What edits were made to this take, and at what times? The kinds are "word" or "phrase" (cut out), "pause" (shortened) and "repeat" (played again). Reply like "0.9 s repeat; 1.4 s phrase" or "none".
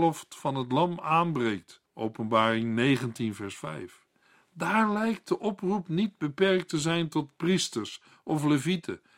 1.9 s pause